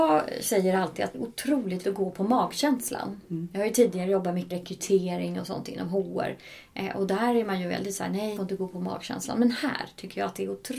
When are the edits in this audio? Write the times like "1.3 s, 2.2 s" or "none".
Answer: 1.1 s, 1.8 s, 4.5 s, 8.4 s